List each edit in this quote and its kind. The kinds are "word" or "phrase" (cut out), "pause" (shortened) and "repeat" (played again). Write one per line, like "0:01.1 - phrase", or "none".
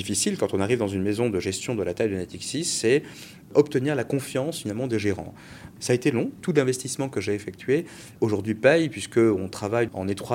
none